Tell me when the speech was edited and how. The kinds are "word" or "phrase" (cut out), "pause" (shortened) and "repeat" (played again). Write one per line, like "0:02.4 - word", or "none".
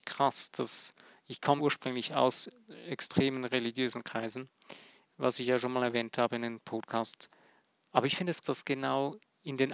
0:01.6 - word
0:08.4 - word